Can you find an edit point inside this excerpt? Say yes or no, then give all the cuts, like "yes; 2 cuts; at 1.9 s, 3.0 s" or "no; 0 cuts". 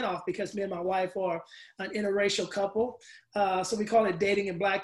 no; 0 cuts